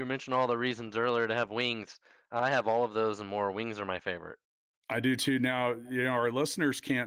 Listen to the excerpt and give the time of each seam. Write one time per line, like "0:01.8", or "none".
none